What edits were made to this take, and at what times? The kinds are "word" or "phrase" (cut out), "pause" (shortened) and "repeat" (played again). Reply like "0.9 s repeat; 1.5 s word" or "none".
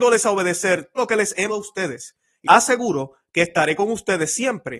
1.0 s word; 1.5 s word; 2.4 s word